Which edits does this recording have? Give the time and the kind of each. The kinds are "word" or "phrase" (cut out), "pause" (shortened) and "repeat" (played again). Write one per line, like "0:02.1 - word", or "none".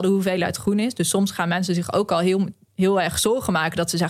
none